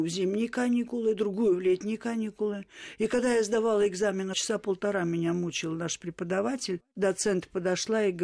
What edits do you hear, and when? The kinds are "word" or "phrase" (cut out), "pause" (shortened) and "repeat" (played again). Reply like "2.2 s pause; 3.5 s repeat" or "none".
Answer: 4.3 s word